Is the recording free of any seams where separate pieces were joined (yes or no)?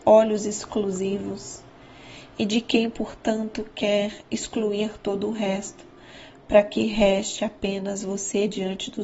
yes